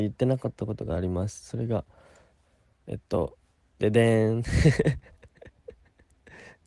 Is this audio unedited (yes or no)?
yes